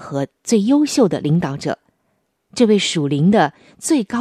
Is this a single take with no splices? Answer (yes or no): yes